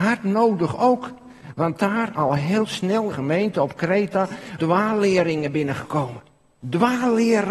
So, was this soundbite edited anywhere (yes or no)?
yes